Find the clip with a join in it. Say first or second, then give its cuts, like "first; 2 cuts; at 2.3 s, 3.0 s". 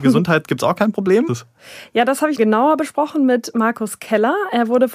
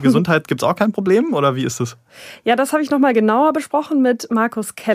first; 2 cuts; at 1.3 s, 2.4 s